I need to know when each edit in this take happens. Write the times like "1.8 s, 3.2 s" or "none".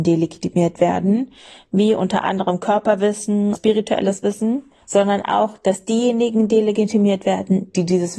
3.5 s, 4.8 s